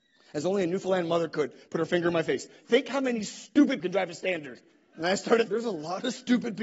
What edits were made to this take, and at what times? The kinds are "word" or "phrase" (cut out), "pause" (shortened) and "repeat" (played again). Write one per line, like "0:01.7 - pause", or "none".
0:03.8 - word
0:04.7 - pause
0:05.5 - word